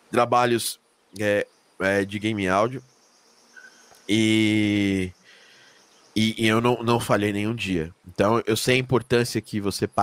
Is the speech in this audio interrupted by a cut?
no; 0 cuts

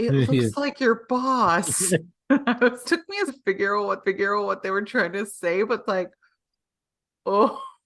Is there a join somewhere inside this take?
yes; 4 cuts; at 2.8 s, 3.3 s, 4.0 s, 5.9 s

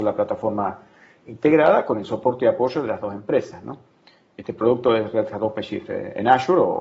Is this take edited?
no; 0 cuts

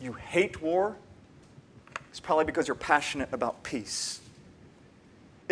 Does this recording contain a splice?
no; 0 cuts

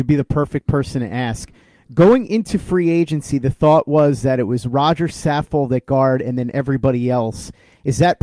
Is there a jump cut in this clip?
no; 0 cuts

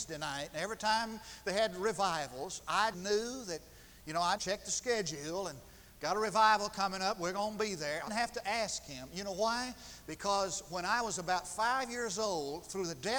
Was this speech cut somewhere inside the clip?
yes; 3 cuts; at 2.9 s, 4.4 s, 8.1 s

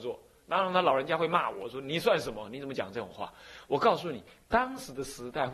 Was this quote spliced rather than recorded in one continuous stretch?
no; 0 cuts

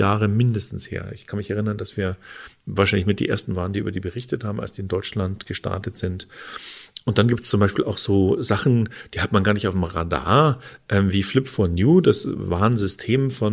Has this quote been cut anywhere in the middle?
no; 0 cuts

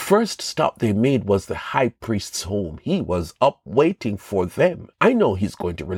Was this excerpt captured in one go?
no; 1 cut; at 4.9 s

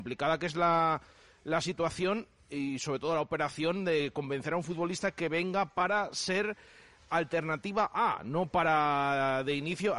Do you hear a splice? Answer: no; 0 cuts

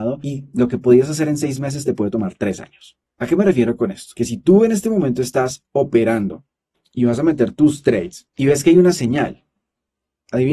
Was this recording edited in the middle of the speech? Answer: no; 0 cuts

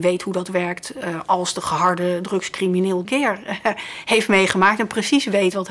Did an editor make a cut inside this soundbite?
yes; 1 cut; at 3.1 s

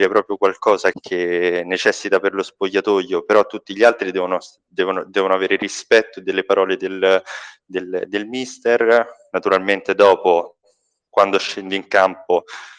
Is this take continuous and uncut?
no; 1 cut; at 0.9 s

